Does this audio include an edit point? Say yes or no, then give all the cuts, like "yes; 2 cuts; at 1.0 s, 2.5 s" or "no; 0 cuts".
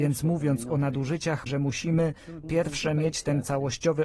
yes; 2 cuts; at 1.5 s, 2.4 s